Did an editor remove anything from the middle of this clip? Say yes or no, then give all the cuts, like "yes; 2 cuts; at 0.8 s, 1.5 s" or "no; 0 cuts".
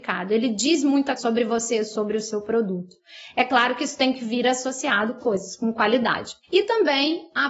yes; 3 cuts; at 1.2 s, 5.2 s, 6.4 s